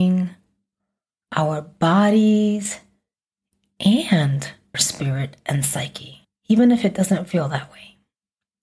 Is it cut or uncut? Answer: cut